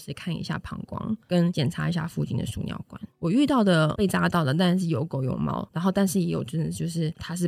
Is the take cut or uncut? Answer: uncut